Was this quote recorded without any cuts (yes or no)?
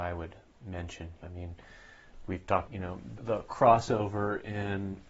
no